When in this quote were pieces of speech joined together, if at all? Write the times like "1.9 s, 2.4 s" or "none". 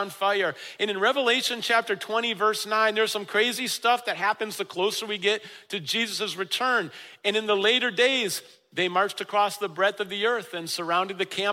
none